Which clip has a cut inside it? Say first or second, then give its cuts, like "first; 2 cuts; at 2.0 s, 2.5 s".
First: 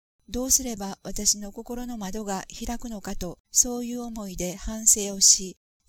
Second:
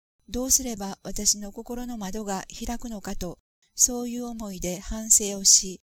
first; 1 cut; at 3.4 s